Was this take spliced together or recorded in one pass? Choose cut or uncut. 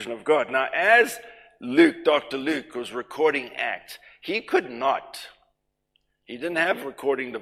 uncut